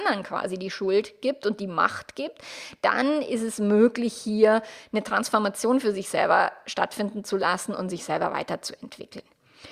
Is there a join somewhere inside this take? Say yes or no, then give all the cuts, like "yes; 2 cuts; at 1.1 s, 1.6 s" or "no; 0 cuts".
no; 0 cuts